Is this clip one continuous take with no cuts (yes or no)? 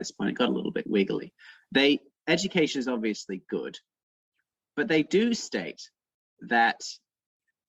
yes